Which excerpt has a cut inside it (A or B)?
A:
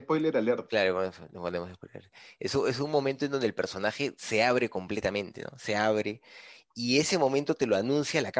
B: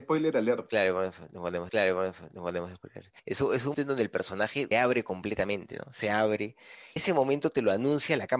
B